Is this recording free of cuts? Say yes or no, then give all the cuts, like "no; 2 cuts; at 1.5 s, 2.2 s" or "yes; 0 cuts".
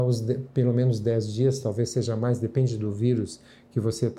yes; 0 cuts